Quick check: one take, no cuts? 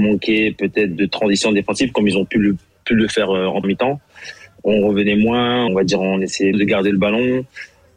no; 4 cuts; at 1.0 s, 3.6 s, 5.7 s, 6.5 s

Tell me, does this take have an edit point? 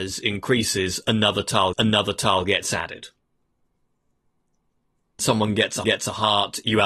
yes; 3 cuts; at 1.7 s, 5.2 s, 5.8 s

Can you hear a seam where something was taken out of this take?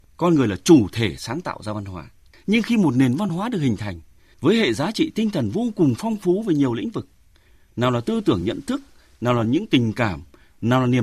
no; 0 cuts

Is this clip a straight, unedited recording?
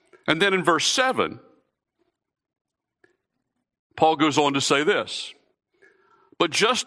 yes; 0 cuts

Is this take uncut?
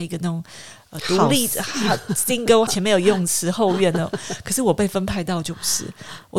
no; 1 cut; at 2.7 s

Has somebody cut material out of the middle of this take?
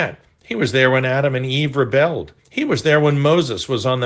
yes; 1 cut; at 2.4 s

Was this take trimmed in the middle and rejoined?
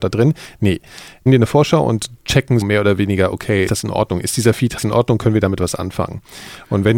yes; 4 cuts; at 1.3 s, 2.6 s, 3.7 s, 4.8 s

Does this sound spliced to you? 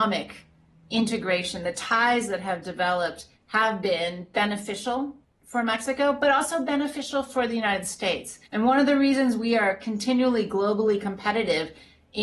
yes; 3 cuts; at 3.4 s, 5.2 s, 8.5 s

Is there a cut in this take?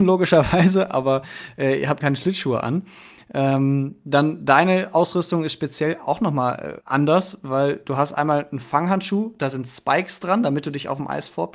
yes; 2 cuts; at 2.0 s, 6.8 s

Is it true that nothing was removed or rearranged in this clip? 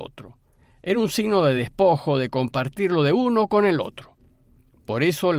yes; 0 cuts

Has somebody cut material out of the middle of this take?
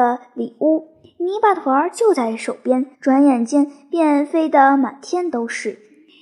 yes; 1 cut; at 2.9 s

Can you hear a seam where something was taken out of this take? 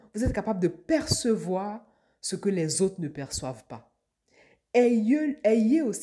no; 0 cuts

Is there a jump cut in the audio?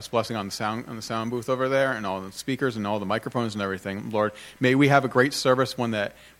no; 0 cuts

